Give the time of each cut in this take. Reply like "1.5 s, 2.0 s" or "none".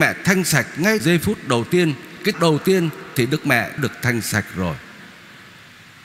1.0 s, 2.3 s, 3.8 s